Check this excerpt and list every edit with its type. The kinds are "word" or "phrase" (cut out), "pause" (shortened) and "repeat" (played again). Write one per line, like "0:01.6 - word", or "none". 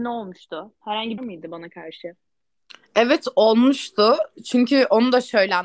0:01.2 - phrase